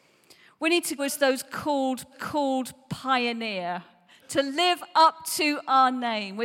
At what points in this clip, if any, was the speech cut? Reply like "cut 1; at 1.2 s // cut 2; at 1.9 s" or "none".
cut 1; at 1.0 s // cut 2; at 2.1 s